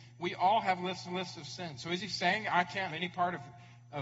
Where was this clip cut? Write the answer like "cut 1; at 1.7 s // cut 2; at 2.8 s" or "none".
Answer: cut 1; at 1.1 s // cut 2; at 2.9 s